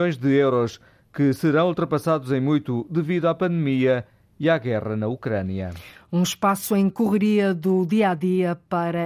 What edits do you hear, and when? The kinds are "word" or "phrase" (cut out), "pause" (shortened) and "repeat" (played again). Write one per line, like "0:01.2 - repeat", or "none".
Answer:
0:06.9 - phrase